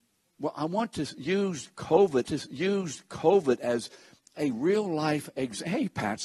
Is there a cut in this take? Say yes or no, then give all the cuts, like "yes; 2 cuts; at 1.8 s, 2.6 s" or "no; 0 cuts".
yes; 1 cut; at 2.2 s